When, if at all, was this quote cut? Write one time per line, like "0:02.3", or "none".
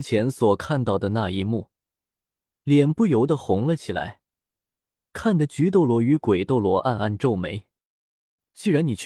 none